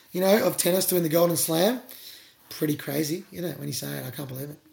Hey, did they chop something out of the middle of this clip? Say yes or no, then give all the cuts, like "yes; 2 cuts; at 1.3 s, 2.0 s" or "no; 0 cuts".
no; 0 cuts